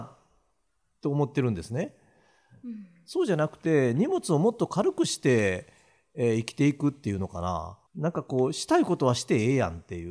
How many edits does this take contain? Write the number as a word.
one